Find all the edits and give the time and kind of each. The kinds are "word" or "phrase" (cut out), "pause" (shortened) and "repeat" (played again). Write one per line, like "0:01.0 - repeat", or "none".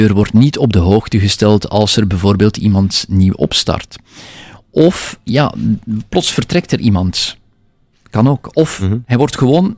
none